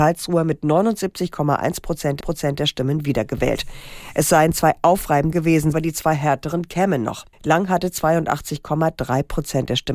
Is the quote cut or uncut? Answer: cut